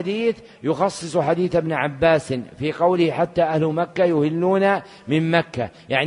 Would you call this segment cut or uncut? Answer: uncut